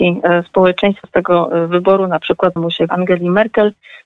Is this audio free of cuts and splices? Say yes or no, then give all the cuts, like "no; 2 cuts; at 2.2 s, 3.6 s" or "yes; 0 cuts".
no; 3 cuts; at 1.0 s, 2.6 s, 2.9 s